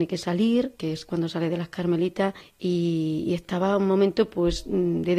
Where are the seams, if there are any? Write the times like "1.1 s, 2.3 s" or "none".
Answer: 2.4 s